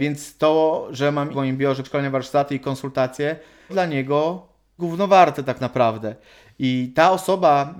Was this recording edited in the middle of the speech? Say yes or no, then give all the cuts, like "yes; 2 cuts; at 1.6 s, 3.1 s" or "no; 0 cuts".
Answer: yes; 4 cuts; at 1.3 s, 1.8 s, 3.7 s, 4.8 s